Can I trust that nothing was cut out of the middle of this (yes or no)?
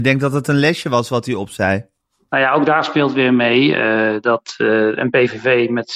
yes